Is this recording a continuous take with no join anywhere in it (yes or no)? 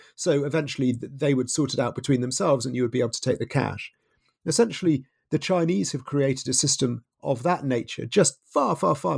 yes